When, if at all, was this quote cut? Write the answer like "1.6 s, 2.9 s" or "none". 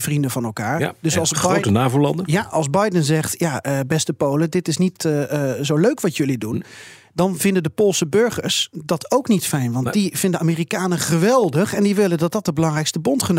none